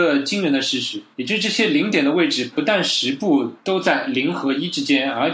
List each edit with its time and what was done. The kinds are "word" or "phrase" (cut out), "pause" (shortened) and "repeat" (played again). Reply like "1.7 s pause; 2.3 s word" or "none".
1.1 s pause; 3.6 s pause